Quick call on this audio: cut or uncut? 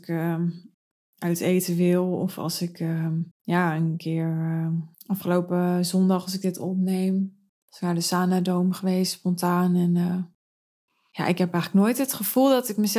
cut